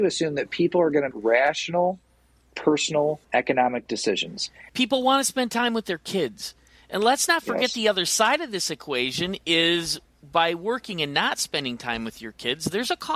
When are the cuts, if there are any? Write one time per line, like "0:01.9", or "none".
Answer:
0:01.1
0:03.2